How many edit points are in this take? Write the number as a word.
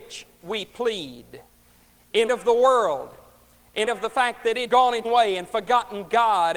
four